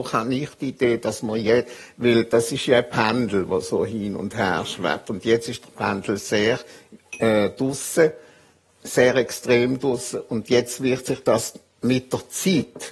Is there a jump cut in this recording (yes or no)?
no